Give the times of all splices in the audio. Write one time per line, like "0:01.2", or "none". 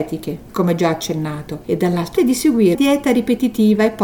0:02.2
0:02.7